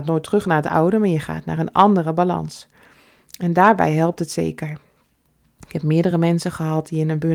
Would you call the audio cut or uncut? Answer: uncut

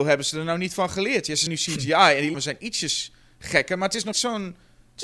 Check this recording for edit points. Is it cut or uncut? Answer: cut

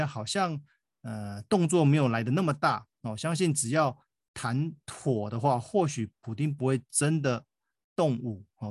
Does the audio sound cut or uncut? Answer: uncut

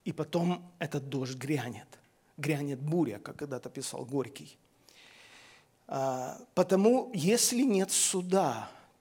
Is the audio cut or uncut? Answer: uncut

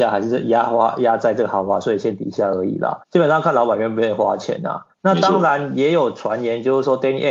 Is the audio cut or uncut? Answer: cut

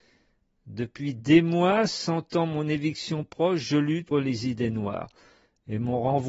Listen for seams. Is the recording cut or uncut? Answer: cut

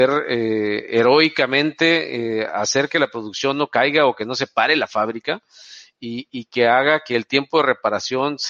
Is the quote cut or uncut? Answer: uncut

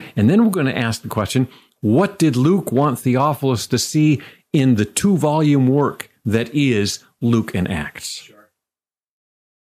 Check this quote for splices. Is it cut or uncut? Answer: uncut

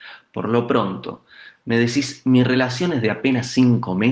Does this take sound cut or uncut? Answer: uncut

